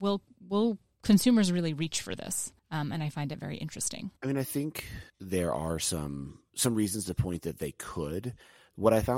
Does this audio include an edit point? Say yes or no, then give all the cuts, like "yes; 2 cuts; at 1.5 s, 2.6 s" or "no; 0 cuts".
yes; 4 cuts; at 2.6 s, 4.2 s, 5.1 s, 6.5 s